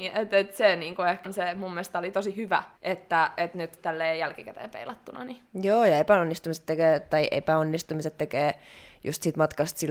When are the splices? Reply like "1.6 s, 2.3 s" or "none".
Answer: 1.2 s, 2.8 s, 3.8 s, 5.5 s